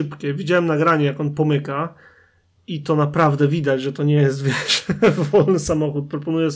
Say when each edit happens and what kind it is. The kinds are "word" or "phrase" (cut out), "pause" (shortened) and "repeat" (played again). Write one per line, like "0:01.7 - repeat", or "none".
none